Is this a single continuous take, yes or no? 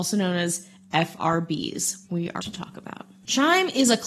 no